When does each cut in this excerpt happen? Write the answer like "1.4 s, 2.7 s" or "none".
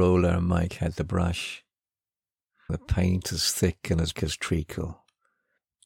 2.7 s, 4.1 s